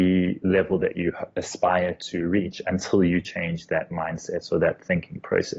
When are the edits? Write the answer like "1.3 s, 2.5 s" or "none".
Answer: none